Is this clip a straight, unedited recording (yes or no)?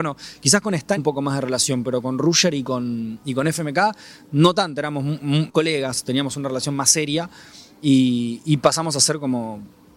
no